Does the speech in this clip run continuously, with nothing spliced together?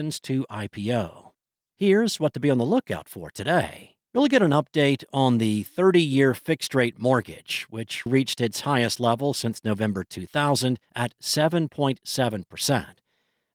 no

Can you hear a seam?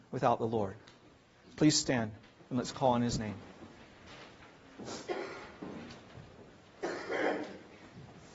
no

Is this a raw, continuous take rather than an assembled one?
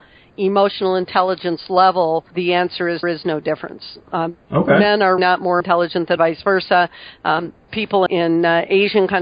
no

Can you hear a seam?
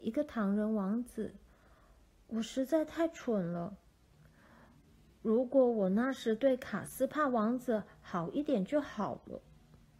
no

